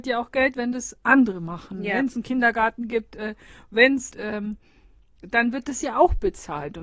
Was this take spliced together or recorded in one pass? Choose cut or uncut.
cut